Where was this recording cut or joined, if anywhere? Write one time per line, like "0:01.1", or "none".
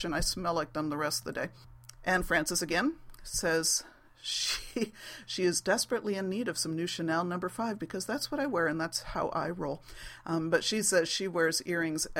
none